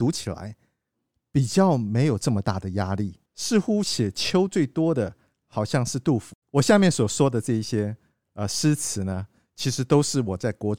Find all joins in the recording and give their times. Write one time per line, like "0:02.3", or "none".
0:03.3
0:06.4